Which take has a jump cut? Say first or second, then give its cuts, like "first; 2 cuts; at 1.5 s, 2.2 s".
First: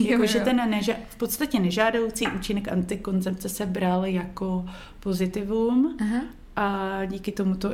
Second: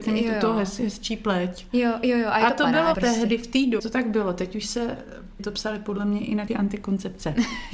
second; 4 cuts; at 2.9 s, 3.8 s, 5.4 s, 6.5 s